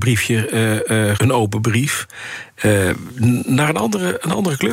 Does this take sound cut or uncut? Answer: cut